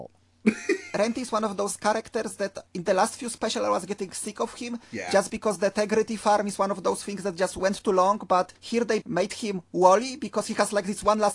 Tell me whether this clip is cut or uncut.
cut